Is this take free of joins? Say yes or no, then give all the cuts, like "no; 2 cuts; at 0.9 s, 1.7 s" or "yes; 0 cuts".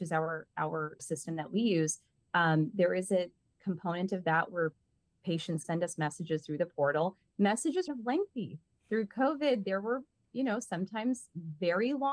no; 3 cuts; at 1.0 s, 5.6 s, 7.9 s